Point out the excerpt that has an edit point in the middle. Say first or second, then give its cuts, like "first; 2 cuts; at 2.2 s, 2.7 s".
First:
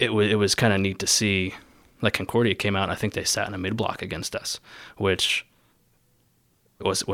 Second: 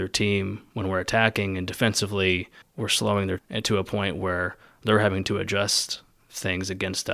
second; 2 cuts; at 2.6 s, 3.4 s